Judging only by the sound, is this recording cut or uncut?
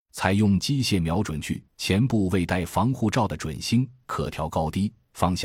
cut